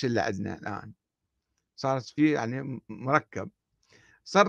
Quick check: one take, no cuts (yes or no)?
no